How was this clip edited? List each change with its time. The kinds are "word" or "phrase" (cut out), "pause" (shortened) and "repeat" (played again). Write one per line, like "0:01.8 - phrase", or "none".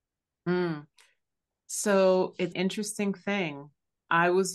0:02.5 - word

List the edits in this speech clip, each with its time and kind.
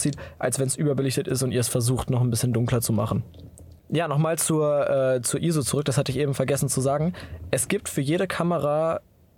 0:03.8 - pause

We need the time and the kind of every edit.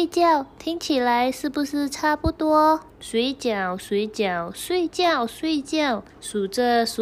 0:02.9 - pause
0:06.1 - pause

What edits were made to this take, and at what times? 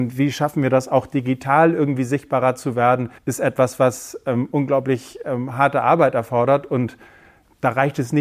0:03.2 - pause

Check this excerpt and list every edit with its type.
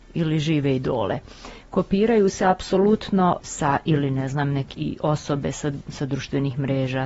0:03.4 - phrase
0:04.7 - word

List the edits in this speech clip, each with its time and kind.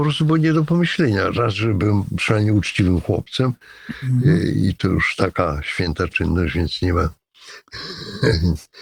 none

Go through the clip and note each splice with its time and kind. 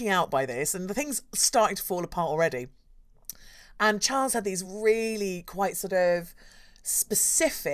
none

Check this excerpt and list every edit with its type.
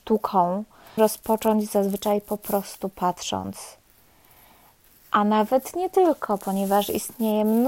0:01.0 - word

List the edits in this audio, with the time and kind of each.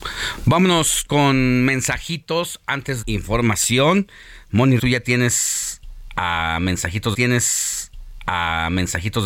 0:03.0 - phrase
0:04.8 - word
0:07.1 - repeat

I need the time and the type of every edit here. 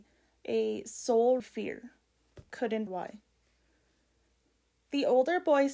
0:01.4 - word
0:02.5 - word
0:02.9 - word

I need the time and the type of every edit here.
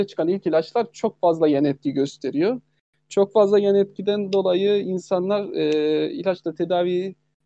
none

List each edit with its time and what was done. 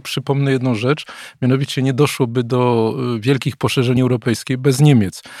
0:04.0 - word

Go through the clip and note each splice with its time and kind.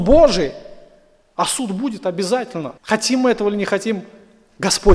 0:02.8 - pause

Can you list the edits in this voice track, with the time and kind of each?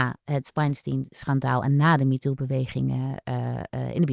none

